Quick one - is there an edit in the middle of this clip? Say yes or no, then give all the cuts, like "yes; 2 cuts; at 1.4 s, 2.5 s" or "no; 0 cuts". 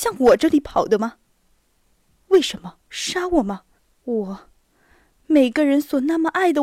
yes; 2 cuts; at 2.8 s, 3.8 s